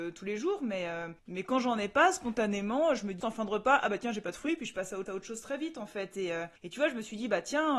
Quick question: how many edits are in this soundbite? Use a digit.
4